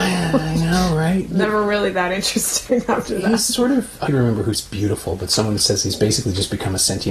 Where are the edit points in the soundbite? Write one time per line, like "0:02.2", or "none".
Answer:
0:04.1
0:04.5